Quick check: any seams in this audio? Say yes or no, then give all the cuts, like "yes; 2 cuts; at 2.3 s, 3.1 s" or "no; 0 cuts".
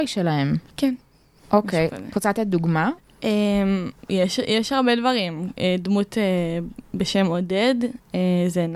no; 0 cuts